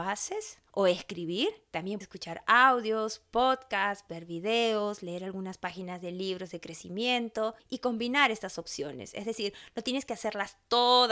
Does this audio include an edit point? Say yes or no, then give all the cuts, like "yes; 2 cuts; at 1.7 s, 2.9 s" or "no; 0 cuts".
yes; 2 cuts; at 2.0 s, 7.6 s